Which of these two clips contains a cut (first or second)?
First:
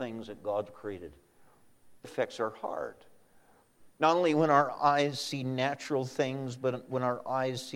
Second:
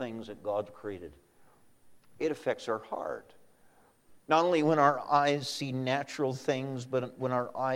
first